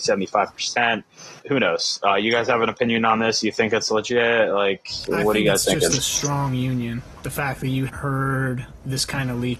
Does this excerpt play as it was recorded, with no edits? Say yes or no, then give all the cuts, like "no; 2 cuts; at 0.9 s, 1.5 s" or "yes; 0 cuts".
no; 2 cuts; at 1.4 s, 7.9 s